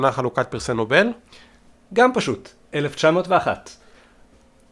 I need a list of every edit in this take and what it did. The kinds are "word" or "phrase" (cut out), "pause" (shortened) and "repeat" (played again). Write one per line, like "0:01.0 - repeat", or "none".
none